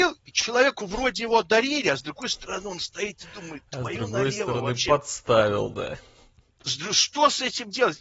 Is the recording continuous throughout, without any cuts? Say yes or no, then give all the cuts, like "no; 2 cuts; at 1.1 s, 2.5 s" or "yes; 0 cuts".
yes; 0 cuts